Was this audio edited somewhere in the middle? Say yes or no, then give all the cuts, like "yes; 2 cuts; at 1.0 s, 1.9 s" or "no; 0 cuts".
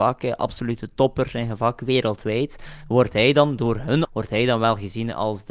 yes; 1 cut; at 4.0 s